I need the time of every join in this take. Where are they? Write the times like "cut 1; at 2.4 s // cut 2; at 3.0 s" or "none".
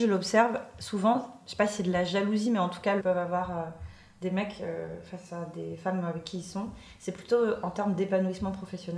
cut 1; at 3.0 s